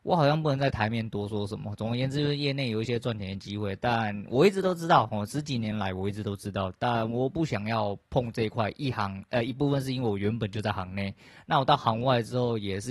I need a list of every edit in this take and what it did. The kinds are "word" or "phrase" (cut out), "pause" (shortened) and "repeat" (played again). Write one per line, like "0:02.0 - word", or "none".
none